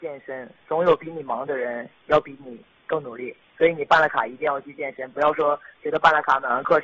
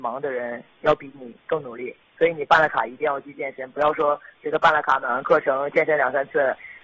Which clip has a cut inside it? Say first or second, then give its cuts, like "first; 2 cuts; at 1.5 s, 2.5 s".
second; 1 cut; at 1.4 s